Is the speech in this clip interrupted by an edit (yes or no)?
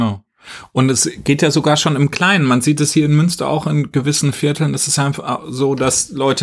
no